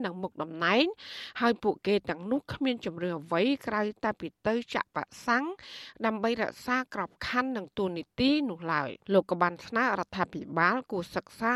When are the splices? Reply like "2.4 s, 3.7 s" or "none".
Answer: 9.0 s